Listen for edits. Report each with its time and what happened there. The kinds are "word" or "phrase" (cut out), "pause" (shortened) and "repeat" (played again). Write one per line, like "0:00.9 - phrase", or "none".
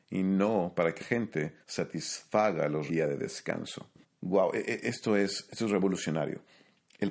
0:01.0 - word
0:01.6 - pause
0:02.9 - phrase
0:04.0 - pause